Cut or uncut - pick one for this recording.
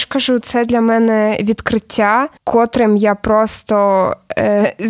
cut